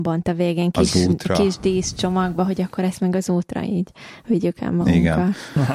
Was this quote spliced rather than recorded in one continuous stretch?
no; 0 cuts

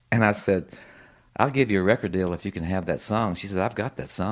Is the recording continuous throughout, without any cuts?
yes; 0 cuts

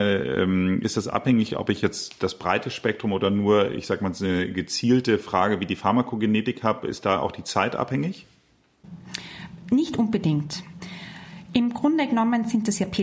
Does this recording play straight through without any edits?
yes; 0 cuts

